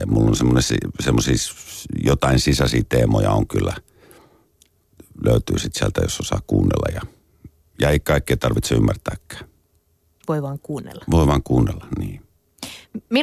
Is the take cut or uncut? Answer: uncut